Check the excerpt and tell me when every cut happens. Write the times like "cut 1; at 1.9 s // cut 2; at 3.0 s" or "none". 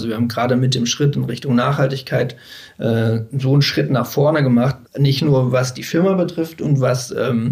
cut 1; at 4.9 s